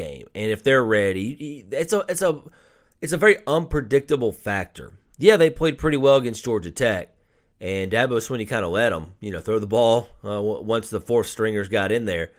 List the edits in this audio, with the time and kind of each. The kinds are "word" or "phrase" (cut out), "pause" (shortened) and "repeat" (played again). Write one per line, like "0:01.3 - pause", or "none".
none